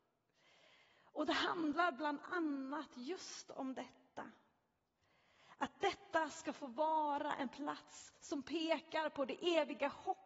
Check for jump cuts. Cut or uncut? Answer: uncut